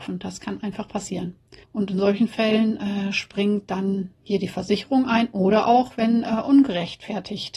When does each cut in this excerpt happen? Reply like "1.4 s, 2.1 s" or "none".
1.6 s, 4.1 s

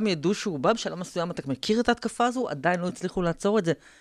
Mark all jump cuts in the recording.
none

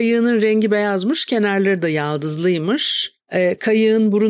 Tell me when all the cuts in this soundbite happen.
3.2 s

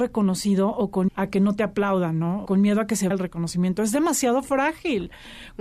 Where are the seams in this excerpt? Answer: 1.1 s, 2.5 s, 3.1 s

